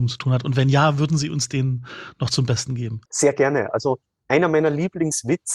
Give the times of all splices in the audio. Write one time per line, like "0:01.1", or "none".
0:03.0